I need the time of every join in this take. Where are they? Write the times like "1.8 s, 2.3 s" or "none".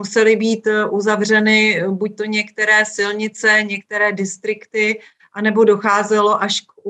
none